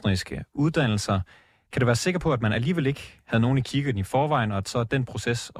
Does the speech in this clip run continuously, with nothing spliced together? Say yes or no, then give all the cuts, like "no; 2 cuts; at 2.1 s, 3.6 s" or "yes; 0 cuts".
yes; 0 cuts